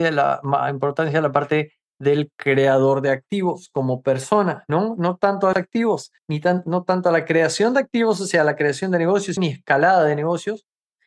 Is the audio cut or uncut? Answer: cut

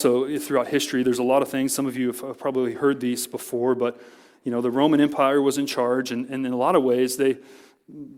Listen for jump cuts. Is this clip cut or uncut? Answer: uncut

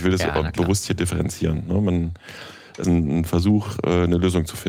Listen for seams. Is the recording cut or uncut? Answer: cut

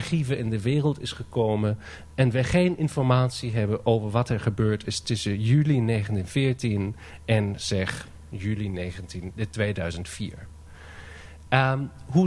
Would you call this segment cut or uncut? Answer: uncut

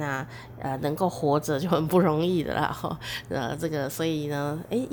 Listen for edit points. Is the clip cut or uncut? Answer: uncut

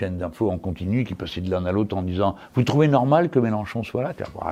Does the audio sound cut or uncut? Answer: uncut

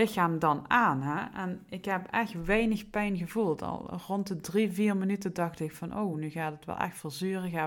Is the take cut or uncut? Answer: uncut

